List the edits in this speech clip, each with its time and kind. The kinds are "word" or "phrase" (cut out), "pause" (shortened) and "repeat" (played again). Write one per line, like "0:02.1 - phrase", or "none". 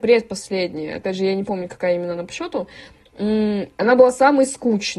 none